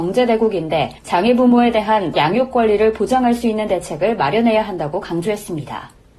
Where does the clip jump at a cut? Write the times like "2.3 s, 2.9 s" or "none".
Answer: 1.0 s, 2.1 s